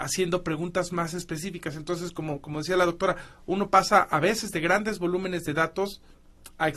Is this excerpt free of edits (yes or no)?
yes